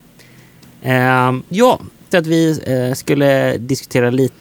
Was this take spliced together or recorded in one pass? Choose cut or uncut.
cut